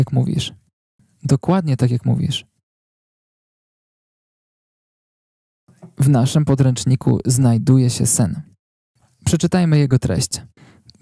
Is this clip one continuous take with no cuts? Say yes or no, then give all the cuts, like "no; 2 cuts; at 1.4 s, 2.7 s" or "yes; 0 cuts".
yes; 0 cuts